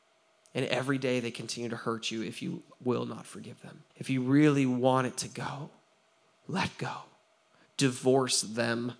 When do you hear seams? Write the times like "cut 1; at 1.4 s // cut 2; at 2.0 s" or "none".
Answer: cut 1; at 3.9 s